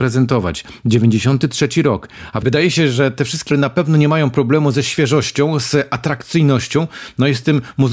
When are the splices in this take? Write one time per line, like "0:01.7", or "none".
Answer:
0:03.5